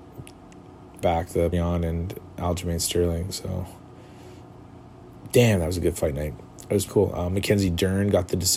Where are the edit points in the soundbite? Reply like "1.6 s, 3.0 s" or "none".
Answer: 1.0 s, 1.5 s, 6.9 s